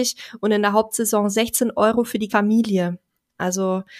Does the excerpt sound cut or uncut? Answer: cut